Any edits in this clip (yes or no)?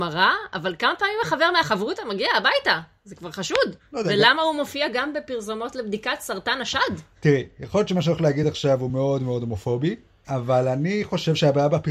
no